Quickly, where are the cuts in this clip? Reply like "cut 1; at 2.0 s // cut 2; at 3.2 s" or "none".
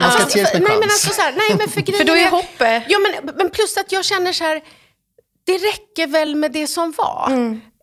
none

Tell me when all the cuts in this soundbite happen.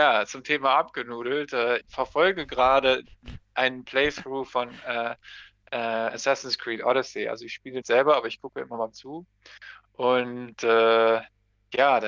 cut 1; at 1.8 s // cut 2; at 7.8 s // cut 3; at 8.9 s

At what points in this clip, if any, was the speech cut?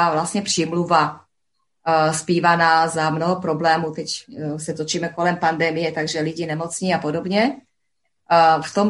none

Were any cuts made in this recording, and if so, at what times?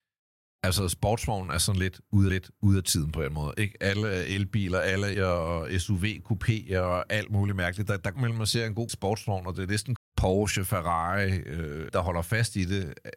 cut 1; at 2.3 s // cut 2; at 5.1 s // cut 3; at 8.2 s // cut 4; at 8.9 s // cut 5; at 10.0 s // cut 6; at 11.9 s

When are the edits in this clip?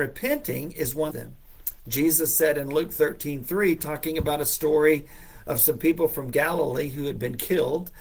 cut 1; at 1.1 s

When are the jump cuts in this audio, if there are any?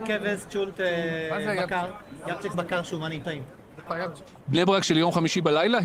cut 1; at 2.5 s // cut 2; at 3.2 s

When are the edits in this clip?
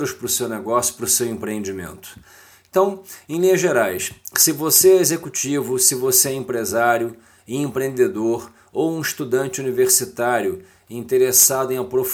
none

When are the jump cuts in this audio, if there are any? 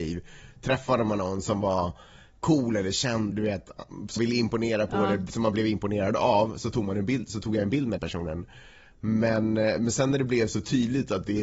cut 1; at 3.3 s // cut 2; at 4.2 s // cut 3; at 8.0 s

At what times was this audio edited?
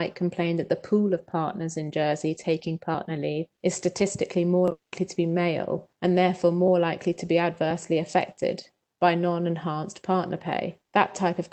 none

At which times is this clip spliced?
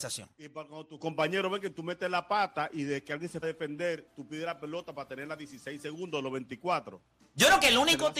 cut 1; at 3.4 s

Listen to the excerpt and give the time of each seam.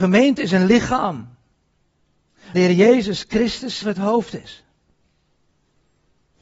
cut 1; at 2.5 s // cut 2; at 3.8 s

